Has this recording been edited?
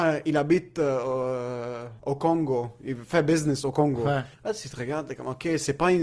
yes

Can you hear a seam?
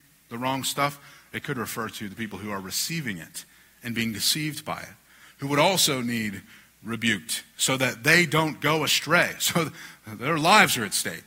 no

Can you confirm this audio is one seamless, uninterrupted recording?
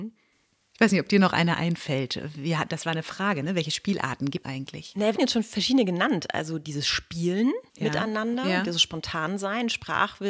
no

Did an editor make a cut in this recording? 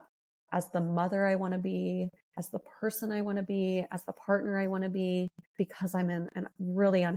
yes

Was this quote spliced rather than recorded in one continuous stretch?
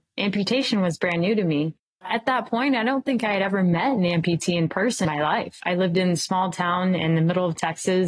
yes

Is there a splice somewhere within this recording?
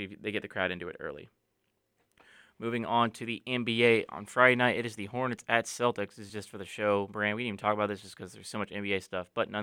no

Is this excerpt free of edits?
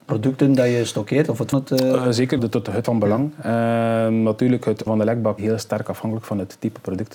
no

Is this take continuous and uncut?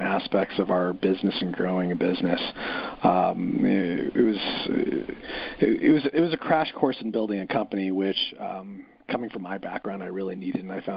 yes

